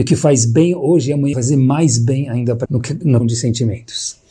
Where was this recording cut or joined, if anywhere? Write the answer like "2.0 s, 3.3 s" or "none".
1.3 s, 2.6 s, 3.2 s

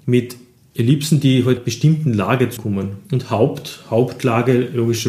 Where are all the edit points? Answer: 1.6 s, 2.6 s, 3.0 s

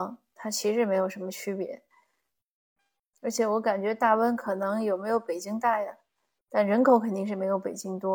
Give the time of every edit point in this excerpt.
none

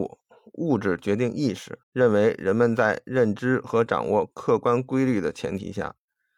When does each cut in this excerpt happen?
1.8 s

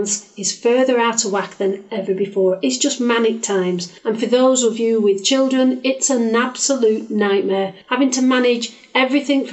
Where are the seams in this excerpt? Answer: 4.0 s, 7.8 s

